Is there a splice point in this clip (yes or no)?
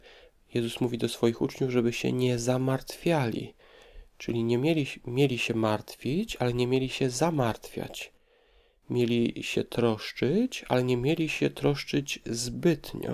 no